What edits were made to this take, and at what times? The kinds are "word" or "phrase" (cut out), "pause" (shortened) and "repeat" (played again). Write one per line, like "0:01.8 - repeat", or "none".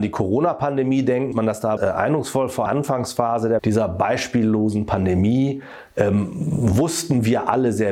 0:01.3 - word
0:01.8 - word
0:02.7 - phrase
0:03.6 - word